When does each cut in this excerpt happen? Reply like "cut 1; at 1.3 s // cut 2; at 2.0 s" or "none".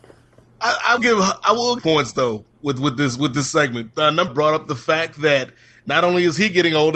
cut 1; at 1.0 s // cut 2; at 1.8 s // cut 3; at 4.3 s